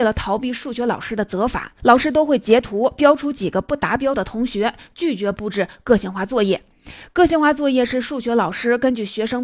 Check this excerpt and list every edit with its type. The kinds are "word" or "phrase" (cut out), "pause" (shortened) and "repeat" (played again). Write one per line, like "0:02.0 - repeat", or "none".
0:01.8 - pause